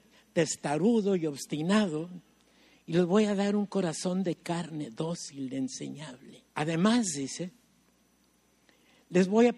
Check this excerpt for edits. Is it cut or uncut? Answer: cut